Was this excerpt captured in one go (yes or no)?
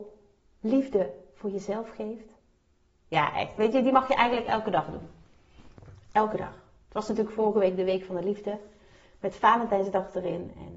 yes